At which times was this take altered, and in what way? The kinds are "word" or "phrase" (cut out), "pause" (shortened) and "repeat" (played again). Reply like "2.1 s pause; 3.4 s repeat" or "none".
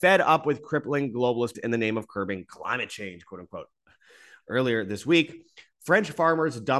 1.5 s word